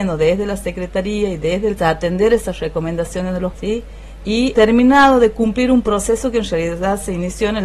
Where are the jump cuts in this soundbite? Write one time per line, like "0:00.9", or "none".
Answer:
0:01.8
0:03.5
0:04.5